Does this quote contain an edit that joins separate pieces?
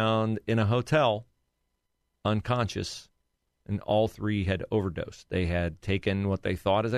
no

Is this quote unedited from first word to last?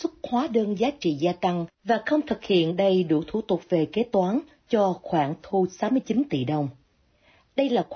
yes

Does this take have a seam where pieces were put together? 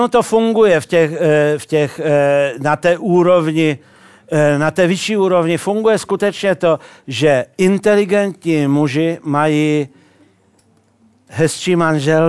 no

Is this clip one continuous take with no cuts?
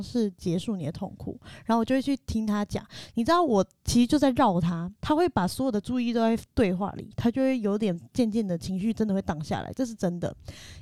no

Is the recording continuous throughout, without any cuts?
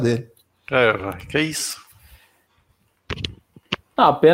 yes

